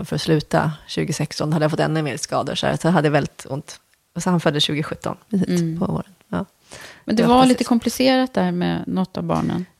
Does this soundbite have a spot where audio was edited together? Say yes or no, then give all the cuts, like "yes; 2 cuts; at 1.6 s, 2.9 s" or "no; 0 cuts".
no; 0 cuts